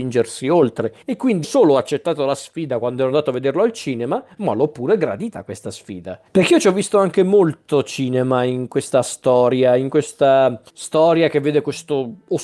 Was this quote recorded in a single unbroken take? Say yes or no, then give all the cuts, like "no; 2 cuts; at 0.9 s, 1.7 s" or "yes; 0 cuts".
no; 4 cuts; at 1.0 s, 1.4 s, 6.3 s, 10.7 s